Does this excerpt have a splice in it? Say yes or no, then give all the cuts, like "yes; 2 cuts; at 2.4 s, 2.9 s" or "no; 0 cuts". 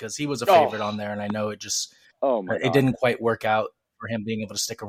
no; 0 cuts